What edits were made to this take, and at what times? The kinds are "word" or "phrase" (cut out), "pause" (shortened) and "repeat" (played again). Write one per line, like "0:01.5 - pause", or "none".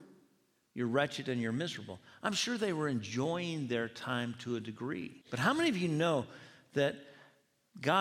0:05.2 - pause